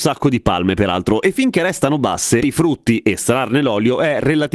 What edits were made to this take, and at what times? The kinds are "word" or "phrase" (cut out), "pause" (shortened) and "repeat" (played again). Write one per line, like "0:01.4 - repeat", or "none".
0:02.4 - word

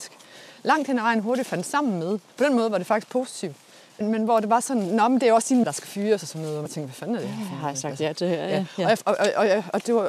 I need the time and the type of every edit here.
0:02.3 - pause
0:04.0 - word
0:05.6 - word
0:06.7 - phrase

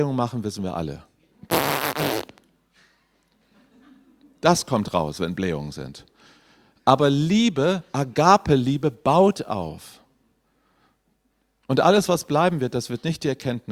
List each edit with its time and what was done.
none

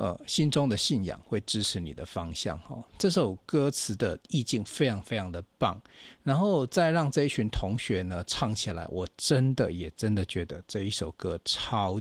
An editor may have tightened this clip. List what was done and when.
0:04.2 - pause

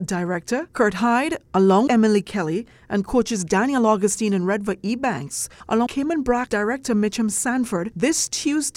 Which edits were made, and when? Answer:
0:01.9 - word
0:05.9 - word
0:06.5 - word

